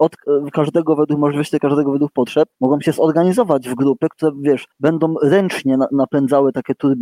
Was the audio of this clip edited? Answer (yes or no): no